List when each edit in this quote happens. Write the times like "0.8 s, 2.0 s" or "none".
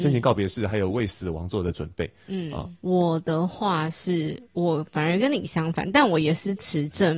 2.8 s